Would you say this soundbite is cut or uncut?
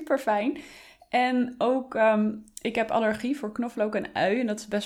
uncut